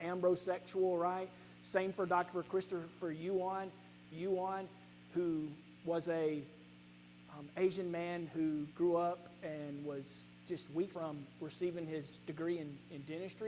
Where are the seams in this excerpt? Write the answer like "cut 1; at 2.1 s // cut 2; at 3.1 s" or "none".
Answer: cut 1; at 4.1 s // cut 2; at 10.9 s